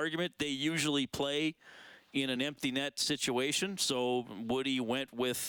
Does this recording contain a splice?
no; 0 cuts

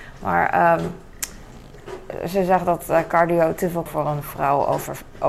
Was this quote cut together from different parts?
yes; 1 cut; at 3.9 s

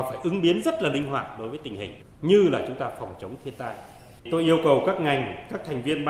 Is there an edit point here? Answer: yes; 1 cut; at 4.2 s

